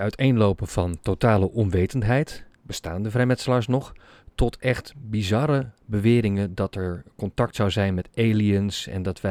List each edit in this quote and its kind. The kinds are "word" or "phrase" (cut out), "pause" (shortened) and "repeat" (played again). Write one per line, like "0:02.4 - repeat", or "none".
0:02.5 - pause